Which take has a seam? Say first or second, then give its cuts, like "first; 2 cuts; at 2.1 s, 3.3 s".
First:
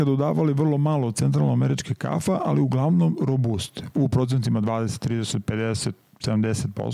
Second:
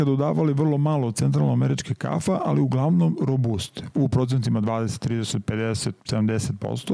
second; 1 cut; at 6.0 s